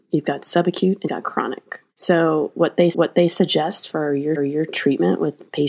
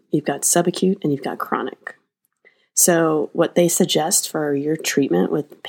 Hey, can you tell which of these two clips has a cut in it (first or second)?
first